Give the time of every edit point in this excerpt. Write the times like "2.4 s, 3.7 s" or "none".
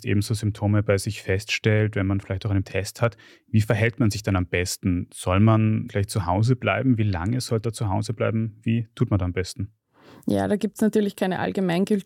2.6 s, 5.9 s, 7.6 s